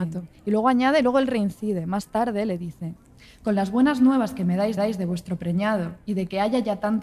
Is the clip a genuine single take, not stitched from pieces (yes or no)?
no